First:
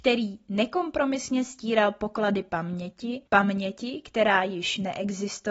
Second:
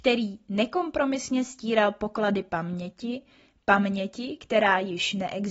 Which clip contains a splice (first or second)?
first